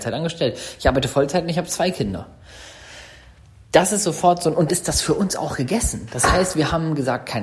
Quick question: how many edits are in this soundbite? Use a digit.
1